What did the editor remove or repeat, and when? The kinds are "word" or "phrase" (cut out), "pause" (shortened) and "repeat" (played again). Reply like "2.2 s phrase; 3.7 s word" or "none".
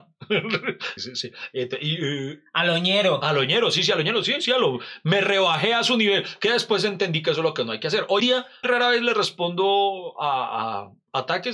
1.0 s word; 8.2 s word; 8.6 s word